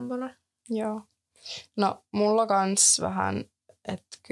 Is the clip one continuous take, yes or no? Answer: yes